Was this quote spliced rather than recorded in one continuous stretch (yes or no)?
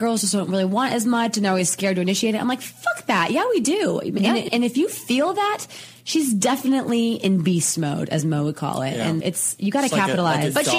yes